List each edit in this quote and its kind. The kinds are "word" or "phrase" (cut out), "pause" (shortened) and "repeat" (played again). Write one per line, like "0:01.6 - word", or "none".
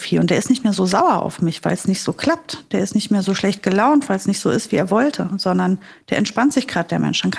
none